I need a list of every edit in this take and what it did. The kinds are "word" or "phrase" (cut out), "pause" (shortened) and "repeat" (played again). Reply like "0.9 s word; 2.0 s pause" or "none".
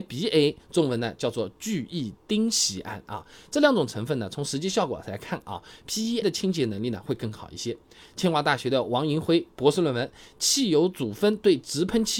6.2 s word